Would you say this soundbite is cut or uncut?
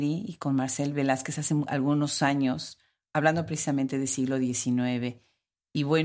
uncut